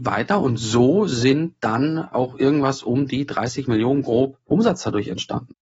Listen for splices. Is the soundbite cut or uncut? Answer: uncut